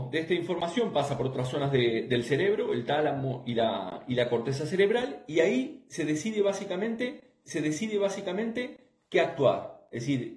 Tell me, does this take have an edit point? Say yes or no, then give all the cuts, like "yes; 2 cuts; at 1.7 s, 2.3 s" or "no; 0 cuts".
yes; 1 cut; at 7.4 s